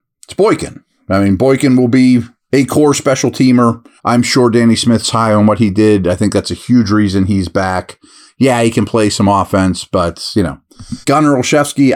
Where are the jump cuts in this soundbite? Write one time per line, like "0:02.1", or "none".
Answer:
0:04.0
0:11.0